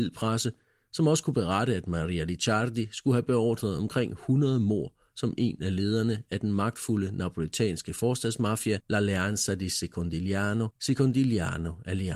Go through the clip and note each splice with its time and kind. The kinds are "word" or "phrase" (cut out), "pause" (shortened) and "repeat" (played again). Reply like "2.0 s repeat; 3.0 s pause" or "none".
8.8 s pause; 10.8 s pause